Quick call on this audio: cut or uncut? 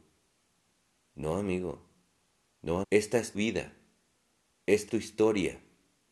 cut